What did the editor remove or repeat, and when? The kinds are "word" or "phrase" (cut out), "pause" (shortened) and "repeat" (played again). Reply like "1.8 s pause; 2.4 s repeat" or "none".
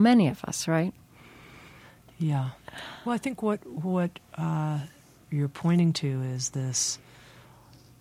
5.2 s word